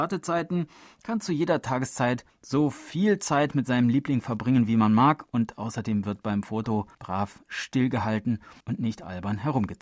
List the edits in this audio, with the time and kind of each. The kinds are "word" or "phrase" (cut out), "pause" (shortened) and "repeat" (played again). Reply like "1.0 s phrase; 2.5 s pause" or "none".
2.3 s pause; 6.9 s pause; 8.6 s pause